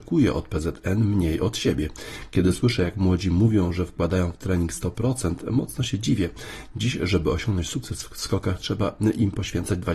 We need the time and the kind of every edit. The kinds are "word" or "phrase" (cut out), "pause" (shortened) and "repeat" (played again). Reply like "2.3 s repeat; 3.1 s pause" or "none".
none